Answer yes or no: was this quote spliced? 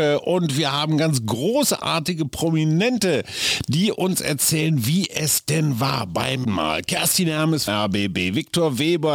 yes